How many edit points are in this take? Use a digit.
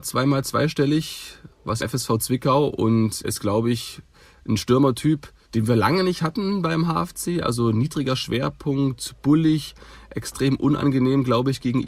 3